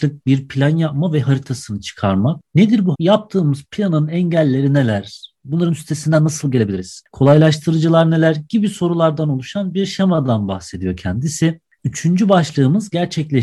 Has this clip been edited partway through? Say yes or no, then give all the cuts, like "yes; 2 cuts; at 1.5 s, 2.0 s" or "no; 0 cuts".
yes; 1 cut; at 2.9 s